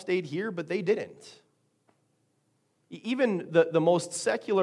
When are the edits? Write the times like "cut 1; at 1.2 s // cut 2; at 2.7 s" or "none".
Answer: none